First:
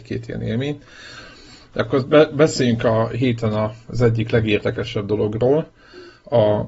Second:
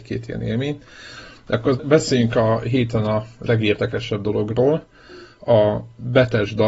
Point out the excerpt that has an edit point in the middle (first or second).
second